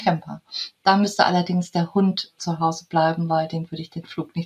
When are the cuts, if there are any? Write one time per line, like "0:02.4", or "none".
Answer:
none

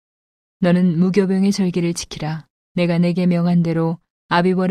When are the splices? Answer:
0:02.6

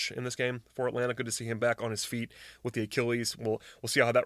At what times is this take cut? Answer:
none

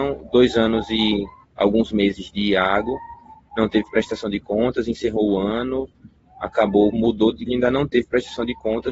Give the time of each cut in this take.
0:06.9
0:07.5

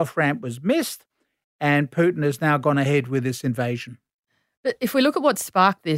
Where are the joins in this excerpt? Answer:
none

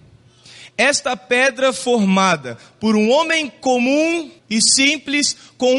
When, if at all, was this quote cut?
0:04.4

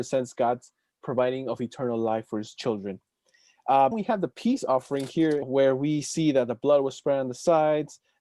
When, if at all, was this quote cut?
0:03.9
0:05.4

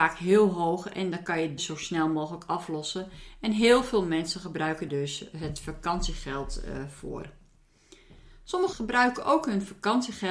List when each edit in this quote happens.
0:01.6
0:04.9
0:08.7

